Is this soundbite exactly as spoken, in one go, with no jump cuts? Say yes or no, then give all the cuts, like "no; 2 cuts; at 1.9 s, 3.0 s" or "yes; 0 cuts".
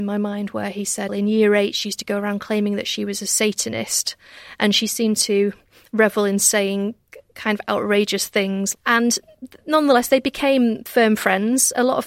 no; 1 cut; at 1.1 s